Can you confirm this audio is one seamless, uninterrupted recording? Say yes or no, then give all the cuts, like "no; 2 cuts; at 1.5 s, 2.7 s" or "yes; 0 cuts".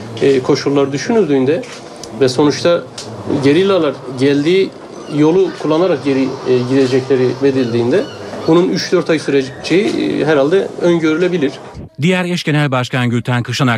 no; 1 cut; at 7.4 s